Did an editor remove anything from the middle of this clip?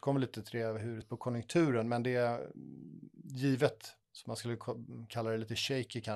yes; 2 cuts; at 1.0 s, 4.0 s

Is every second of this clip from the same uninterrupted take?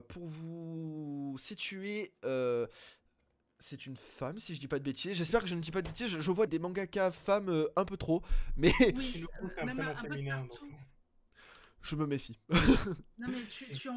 no; 1 cut; at 6.5 s

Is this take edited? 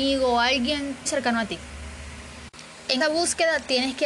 yes; 2 cuts; at 1.1 s, 3.0 s

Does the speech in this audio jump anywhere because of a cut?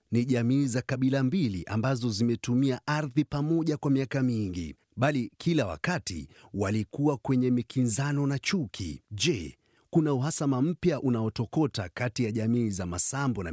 yes; 2 cuts; at 4.8 s, 9.0 s

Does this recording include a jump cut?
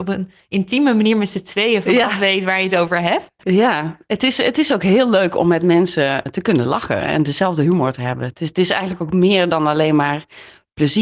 yes; 1 cut; at 6.3 s

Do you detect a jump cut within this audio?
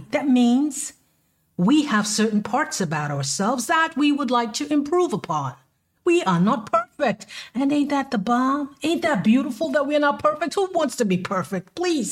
no; 0 cuts

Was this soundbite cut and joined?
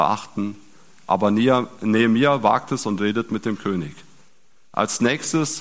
no; 0 cuts

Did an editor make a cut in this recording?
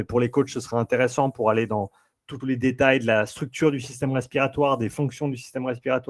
yes; 1 cut; at 2.4 s

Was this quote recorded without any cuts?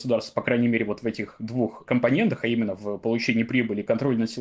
yes; 0 cuts

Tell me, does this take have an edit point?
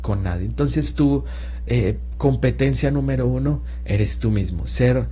no; 0 cuts

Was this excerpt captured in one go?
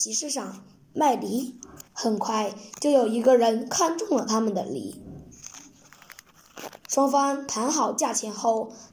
no; 2 cuts; at 1.8 s, 6.8 s

